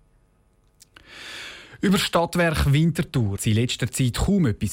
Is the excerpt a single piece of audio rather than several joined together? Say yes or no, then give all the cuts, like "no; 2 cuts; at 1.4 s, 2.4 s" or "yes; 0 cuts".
no; 1 cut; at 3.4 s